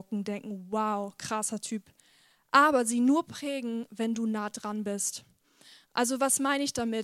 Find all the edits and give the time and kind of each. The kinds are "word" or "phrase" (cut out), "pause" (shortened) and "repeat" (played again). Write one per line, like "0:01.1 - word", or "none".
none